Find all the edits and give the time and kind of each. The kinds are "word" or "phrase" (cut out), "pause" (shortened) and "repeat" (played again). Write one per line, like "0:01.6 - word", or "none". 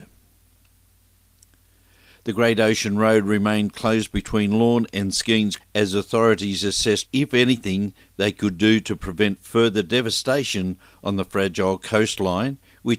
0:05.6 - word
0:07.1 - word